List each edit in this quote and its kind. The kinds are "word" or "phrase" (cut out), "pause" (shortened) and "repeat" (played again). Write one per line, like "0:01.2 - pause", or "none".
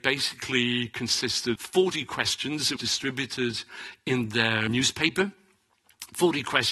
0:01.6 - word
0:02.8 - word
0:04.7 - word